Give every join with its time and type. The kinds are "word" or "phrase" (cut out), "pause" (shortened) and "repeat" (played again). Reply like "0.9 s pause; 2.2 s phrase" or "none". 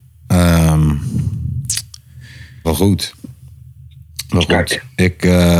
2.6 s word